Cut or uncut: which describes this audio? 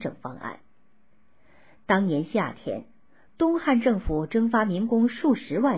uncut